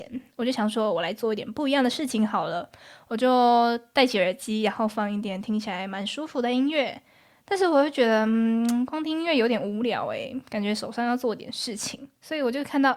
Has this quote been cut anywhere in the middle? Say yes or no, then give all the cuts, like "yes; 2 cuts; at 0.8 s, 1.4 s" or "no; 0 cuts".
no; 0 cuts